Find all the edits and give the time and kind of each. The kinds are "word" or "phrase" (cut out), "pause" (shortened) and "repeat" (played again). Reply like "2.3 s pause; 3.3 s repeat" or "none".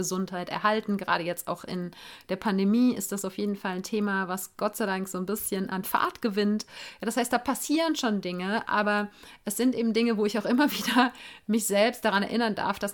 none